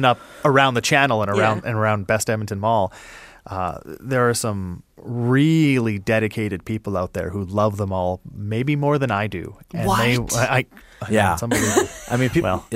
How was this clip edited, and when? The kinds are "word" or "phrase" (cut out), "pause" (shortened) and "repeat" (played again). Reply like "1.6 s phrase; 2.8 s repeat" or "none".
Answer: none